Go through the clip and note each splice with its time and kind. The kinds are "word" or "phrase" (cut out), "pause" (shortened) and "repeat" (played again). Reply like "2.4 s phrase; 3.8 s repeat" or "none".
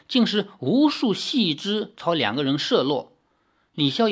none